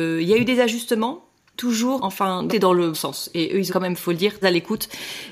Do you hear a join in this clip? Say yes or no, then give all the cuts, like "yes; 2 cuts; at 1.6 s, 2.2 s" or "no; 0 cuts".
yes; 6 cuts; at 1.5 s, 2.0 s, 2.5 s, 2.9 s, 3.7 s, 4.4 s